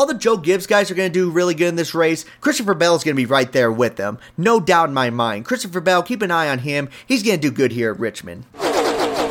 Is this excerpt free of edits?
yes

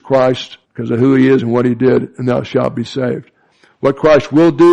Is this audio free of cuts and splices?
yes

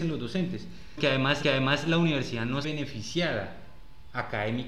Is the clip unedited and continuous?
no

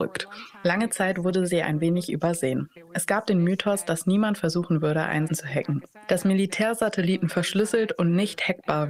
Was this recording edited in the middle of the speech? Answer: yes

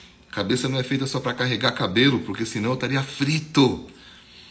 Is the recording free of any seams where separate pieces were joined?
yes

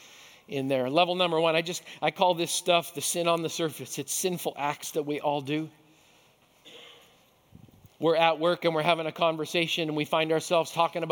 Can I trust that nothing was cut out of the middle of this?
yes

